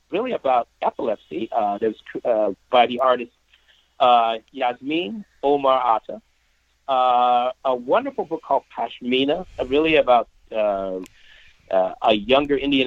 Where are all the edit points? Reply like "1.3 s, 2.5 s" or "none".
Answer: none